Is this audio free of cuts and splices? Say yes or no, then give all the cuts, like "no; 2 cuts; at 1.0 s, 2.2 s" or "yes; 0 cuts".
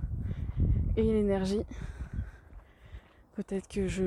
yes; 0 cuts